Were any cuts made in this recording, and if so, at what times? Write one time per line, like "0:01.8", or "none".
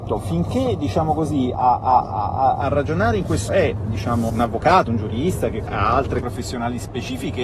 0:01.5
0:03.5
0:04.3
0:04.9
0:05.7
0:06.2